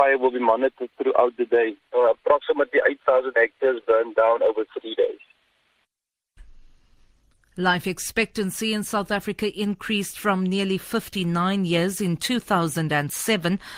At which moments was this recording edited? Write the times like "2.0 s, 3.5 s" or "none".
none